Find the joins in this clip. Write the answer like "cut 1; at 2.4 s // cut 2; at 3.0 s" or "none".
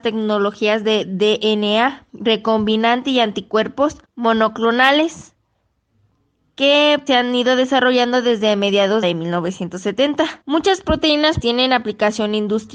cut 1; at 2.1 s // cut 2; at 4.0 s // cut 3; at 7.1 s // cut 4; at 9.0 s // cut 5; at 10.4 s // cut 6; at 11.4 s